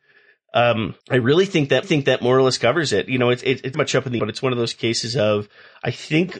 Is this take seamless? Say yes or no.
no